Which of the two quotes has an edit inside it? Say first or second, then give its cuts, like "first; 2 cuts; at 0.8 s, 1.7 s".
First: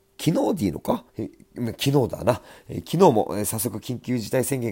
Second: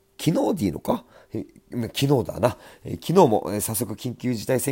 first; 1 cut; at 1.1 s